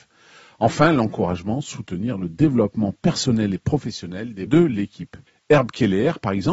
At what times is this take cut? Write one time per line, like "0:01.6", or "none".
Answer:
0:04.5
0:05.3